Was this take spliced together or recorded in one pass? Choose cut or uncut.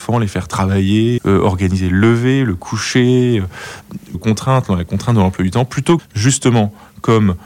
cut